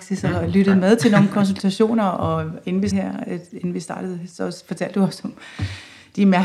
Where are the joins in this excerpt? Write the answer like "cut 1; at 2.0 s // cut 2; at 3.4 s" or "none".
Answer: cut 1; at 2.9 s